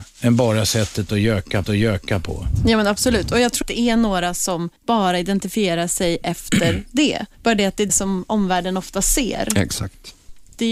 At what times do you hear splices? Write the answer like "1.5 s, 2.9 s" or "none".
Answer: 1.6 s, 3.6 s, 4.8 s, 7.3 s, 7.9 s